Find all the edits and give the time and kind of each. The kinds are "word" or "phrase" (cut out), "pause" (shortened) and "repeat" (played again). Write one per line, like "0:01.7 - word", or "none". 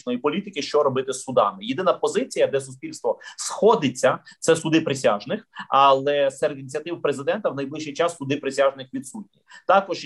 none